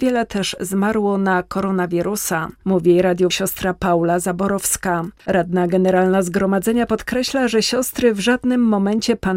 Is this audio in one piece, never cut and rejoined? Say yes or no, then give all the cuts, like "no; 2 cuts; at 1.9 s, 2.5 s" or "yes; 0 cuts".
no; 2 cuts; at 3.3 s, 5.2 s